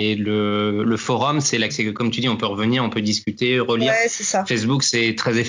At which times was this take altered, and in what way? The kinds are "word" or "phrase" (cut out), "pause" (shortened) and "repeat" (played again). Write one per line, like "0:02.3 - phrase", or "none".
0:01.7 - word